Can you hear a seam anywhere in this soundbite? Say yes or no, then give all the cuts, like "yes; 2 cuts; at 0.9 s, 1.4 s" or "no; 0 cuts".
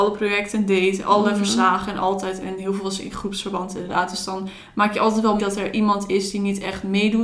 yes; 1 cut; at 5.4 s